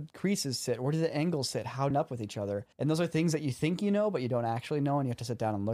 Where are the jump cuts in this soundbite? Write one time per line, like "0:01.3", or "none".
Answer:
0:01.9
0:02.7